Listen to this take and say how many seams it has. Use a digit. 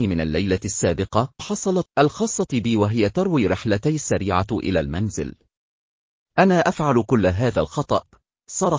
2